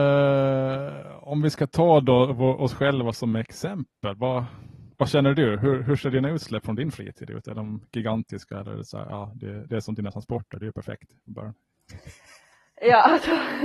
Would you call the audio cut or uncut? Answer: uncut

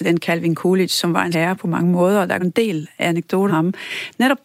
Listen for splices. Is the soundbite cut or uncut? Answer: cut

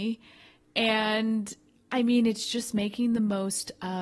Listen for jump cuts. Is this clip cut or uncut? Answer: uncut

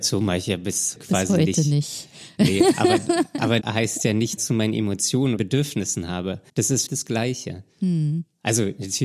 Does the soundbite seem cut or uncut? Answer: cut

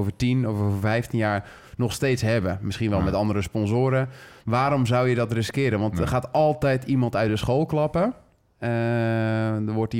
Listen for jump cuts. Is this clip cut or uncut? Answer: uncut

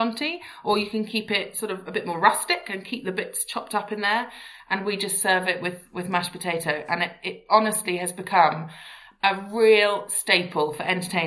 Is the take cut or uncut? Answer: uncut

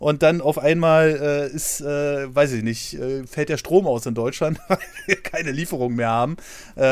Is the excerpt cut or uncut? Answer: uncut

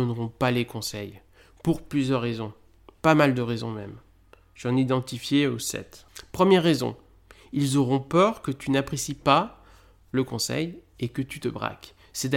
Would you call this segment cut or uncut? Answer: uncut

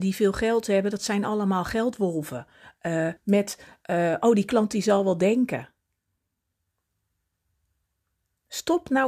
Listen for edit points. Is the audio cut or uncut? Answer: cut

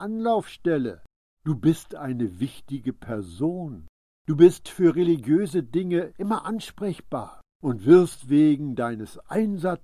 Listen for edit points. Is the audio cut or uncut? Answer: uncut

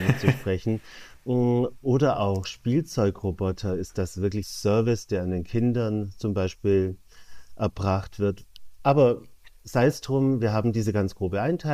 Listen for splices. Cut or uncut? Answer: cut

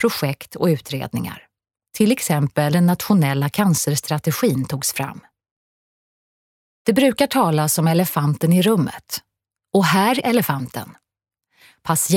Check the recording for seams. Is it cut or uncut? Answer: cut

